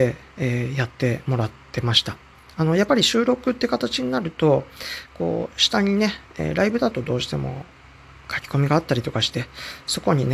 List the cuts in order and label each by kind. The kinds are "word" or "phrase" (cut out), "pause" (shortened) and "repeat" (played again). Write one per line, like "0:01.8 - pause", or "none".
none